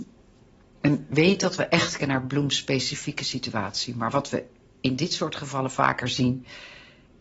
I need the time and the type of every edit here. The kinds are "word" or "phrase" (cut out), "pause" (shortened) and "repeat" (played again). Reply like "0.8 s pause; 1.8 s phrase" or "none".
2.0 s word